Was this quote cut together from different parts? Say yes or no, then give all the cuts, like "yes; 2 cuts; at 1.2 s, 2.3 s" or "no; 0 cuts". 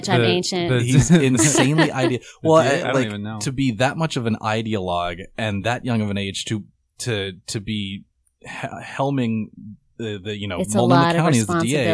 no; 0 cuts